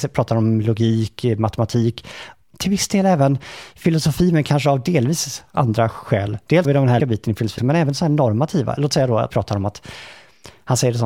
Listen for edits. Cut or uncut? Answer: cut